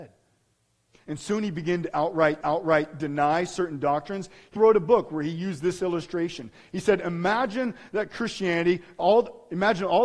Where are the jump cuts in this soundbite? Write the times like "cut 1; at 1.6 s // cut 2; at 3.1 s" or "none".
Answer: cut 1; at 2.4 s // cut 2; at 4.6 s